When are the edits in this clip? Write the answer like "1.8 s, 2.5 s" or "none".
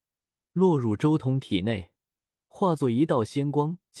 none